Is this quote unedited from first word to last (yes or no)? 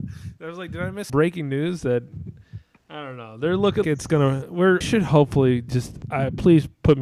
no